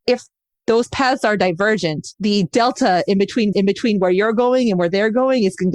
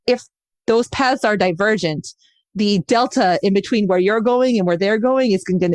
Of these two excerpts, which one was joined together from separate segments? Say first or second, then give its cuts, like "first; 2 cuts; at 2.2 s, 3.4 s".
first; 2 cuts; at 2.1 s, 3.5 s